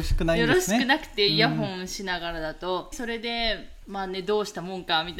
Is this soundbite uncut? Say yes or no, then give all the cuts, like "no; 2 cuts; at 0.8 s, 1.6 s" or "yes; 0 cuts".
no; 1 cut; at 2.9 s